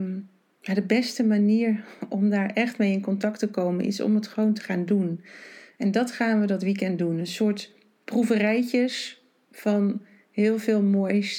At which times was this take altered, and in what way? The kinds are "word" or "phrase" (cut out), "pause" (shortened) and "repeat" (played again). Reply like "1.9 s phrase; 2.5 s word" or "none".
none